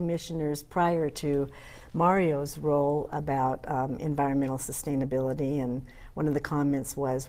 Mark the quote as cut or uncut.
uncut